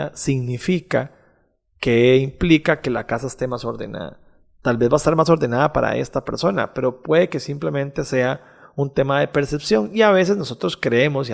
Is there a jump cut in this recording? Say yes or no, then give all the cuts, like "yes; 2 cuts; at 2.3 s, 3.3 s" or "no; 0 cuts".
no; 0 cuts